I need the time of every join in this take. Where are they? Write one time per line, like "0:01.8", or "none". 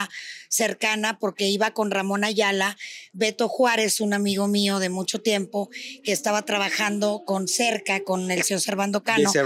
none